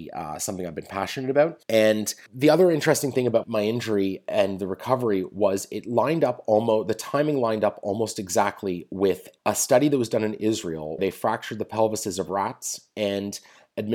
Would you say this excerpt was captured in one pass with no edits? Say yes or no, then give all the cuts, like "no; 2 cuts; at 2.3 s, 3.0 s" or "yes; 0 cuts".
no; 2 cuts; at 3.4 s, 11.0 s